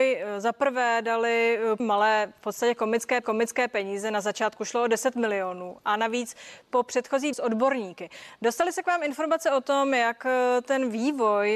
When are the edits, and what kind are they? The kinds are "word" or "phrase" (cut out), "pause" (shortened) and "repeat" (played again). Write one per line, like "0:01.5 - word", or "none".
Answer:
0:01.8 - word
0:03.2 - repeat
0:07.3 - word

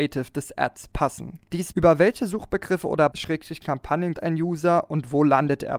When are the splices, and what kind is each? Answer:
0:01.7 - word
0:03.1 - word
0:04.1 - word

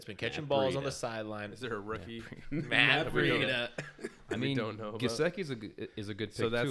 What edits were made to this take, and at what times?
none

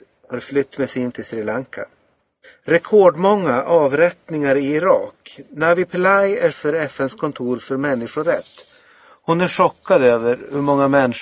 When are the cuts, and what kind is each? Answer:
0:01.1 - word
0:02.4 - pause
0:06.5 - word

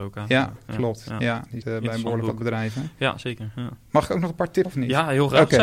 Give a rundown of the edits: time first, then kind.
0:01.6 - word
0:04.6 - word

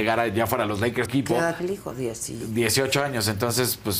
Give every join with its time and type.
0:01.1 - phrase
0:01.6 - word

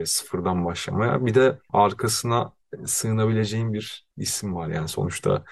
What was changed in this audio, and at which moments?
0:04.1 - pause

